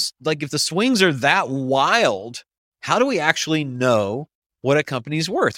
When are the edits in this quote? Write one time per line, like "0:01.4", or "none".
none